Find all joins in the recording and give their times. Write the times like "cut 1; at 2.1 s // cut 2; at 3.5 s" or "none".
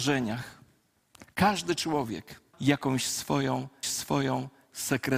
cut 1; at 2.5 s // cut 2; at 3.8 s